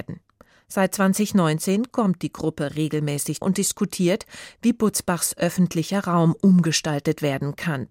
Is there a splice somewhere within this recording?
yes; 1 cut; at 3.4 s

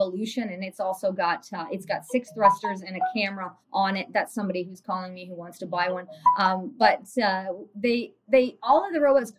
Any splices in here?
yes; 1 cut; at 3.6 s

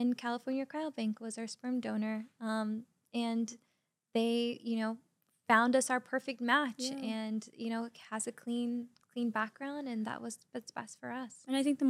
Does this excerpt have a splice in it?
no; 0 cuts

